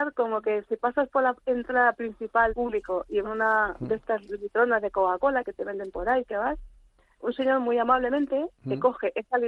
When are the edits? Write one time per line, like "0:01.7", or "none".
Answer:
0:02.5
0:03.2